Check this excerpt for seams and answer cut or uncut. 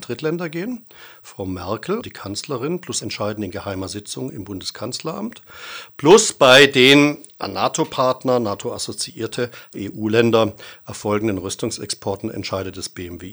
cut